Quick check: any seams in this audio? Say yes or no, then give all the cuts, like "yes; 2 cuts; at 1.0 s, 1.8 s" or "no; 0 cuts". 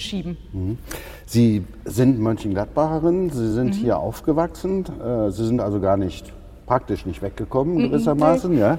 no; 0 cuts